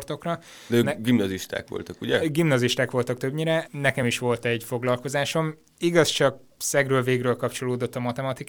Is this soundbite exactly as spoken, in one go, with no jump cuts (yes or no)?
yes